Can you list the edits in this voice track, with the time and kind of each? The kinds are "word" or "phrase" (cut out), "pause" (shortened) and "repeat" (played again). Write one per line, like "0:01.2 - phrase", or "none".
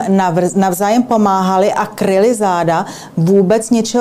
none